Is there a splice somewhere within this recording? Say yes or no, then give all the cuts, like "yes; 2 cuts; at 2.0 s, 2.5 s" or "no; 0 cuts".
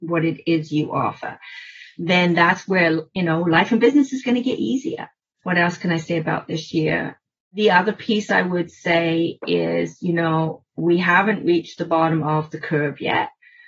no; 0 cuts